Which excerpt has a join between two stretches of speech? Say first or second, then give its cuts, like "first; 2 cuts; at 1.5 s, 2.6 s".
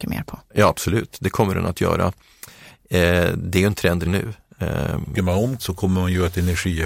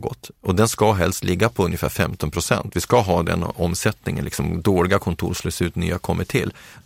first; 3 cuts; at 4.0 s, 5.1 s, 5.6 s